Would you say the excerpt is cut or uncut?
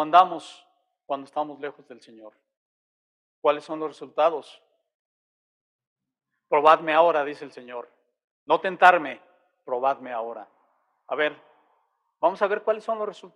uncut